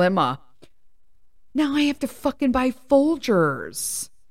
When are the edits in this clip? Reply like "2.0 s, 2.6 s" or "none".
none